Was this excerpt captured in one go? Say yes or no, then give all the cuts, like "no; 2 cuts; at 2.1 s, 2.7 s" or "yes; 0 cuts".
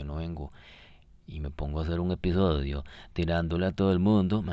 yes; 0 cuts